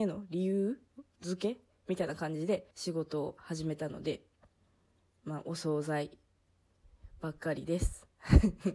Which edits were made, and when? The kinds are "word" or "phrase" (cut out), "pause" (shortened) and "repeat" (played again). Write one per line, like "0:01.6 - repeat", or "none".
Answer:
0:02.7 - pause